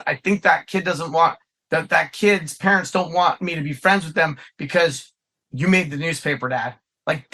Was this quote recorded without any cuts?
yes; 0 cuts

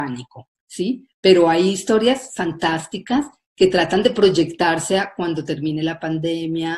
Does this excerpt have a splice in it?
no; 0 cuts

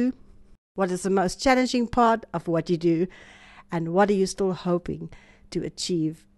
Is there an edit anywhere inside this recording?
no; 0 cuts

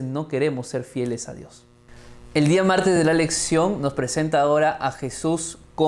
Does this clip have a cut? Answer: no; 0 cuts

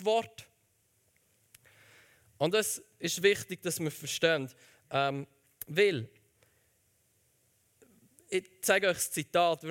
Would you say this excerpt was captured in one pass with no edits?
yes; 0 cuts

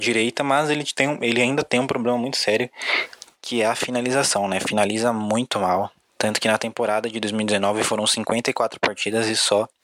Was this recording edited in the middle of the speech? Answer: no; 0 cuts

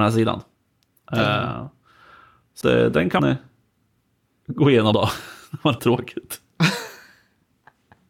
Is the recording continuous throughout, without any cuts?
no; 4 cuts; at 2.6 s, 3.2 s, 4.9 s, 5.8 s

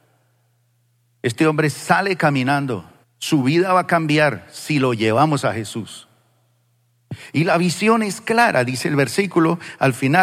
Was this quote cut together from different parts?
yes; 1 cut; at 3.0 s

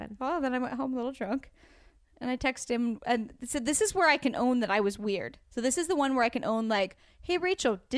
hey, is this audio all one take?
yes; 0 cuts

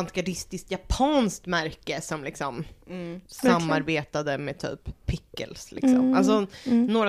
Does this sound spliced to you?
yes; 2 cuts; at 3.3 s, 5.0 s

